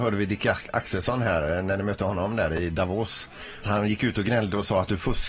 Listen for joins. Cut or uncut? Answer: cut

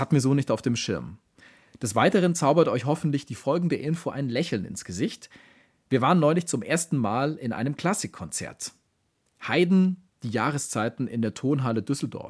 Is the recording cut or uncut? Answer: uncut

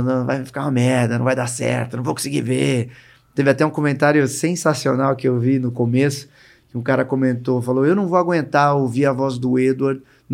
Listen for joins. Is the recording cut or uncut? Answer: uncut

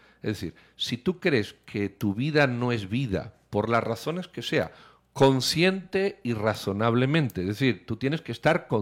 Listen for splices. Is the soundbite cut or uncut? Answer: uncut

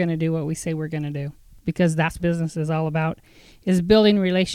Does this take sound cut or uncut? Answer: cut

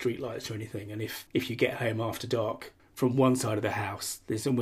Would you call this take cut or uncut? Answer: cut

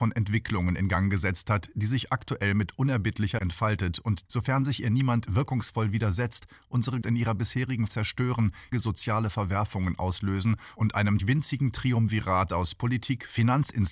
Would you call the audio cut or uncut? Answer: cut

